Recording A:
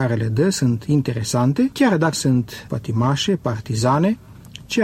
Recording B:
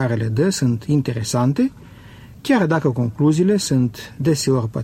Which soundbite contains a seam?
A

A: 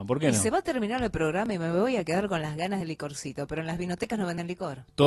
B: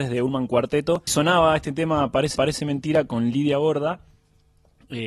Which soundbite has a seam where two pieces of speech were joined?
B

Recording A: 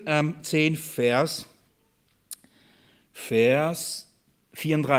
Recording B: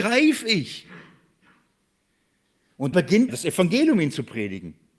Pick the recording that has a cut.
B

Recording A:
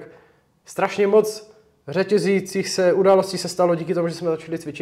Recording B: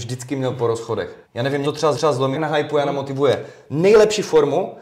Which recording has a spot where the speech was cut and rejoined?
B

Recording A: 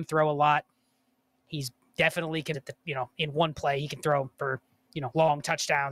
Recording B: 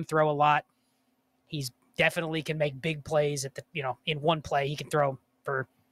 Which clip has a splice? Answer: A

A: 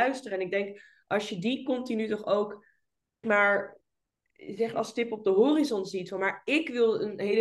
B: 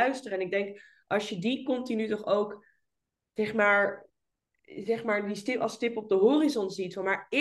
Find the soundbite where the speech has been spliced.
A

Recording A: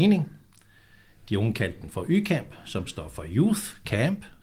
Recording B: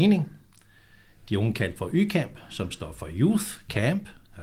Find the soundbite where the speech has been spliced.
B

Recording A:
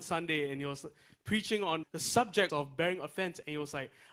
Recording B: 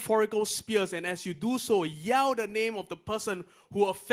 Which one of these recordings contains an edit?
A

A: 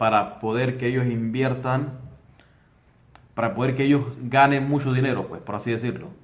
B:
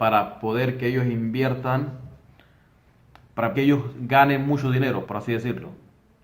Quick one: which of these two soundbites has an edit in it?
B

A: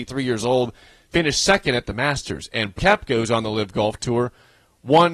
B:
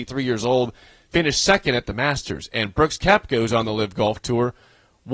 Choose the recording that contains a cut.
A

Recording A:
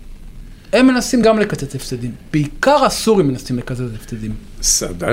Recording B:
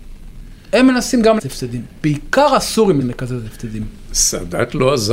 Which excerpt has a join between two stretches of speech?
B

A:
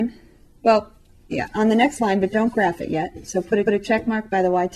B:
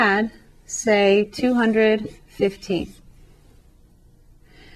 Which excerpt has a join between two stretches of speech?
A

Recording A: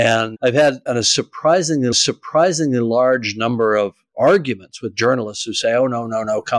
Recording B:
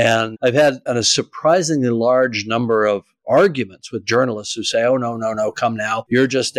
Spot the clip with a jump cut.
A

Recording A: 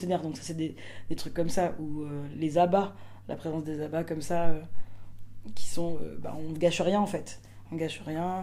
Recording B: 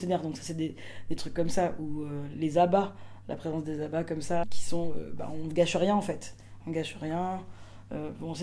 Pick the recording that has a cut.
B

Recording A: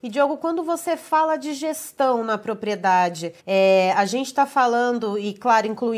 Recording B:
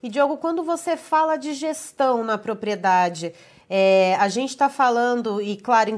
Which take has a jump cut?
A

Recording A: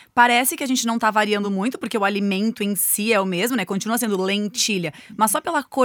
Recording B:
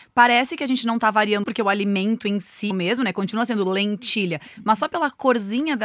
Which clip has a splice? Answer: B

